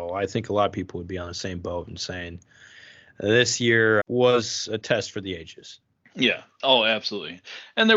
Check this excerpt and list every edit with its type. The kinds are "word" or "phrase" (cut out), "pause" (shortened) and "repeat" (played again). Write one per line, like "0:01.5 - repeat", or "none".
0:04.0 - word